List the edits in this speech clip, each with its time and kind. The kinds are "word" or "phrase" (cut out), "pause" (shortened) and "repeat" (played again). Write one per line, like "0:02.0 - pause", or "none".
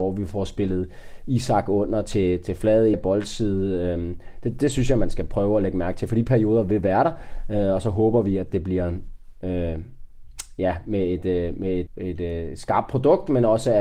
0:02.9 - phrase
0:11.9 - word